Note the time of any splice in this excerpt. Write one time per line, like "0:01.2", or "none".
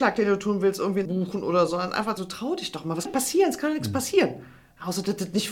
0:01.1
0:01.7
0:02.2
0:03.1